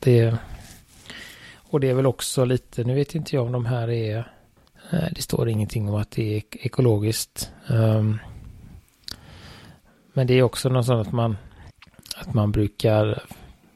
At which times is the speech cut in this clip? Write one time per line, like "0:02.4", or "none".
none

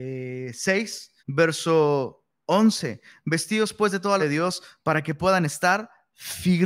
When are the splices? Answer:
0:01.2
0:04.2

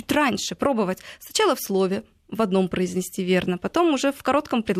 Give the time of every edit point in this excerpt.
none

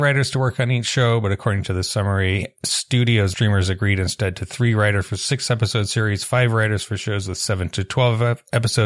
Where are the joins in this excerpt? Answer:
0:03.3

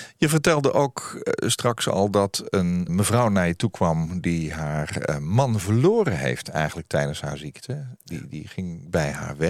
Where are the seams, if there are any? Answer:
0:02.9

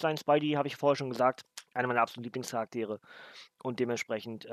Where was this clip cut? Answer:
0:01.7

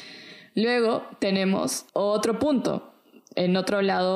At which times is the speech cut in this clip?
0:01.9

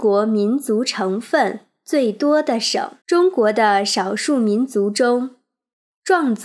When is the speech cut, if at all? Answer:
0:03.0

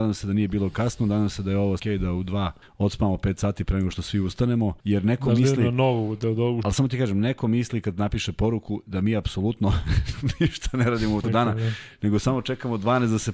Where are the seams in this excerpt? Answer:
0:01.8
0:02.6
0:04.8
0:06.6
0:11.2

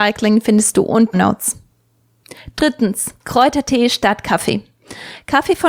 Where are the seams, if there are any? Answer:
0:01.1
0:03.2

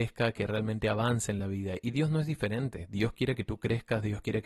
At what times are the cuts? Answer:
none

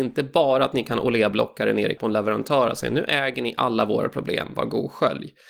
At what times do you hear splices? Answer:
0:02.0

